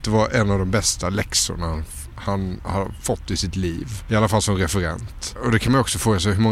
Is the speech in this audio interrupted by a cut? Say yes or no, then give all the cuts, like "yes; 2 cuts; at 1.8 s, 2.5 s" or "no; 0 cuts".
no; 0 cuts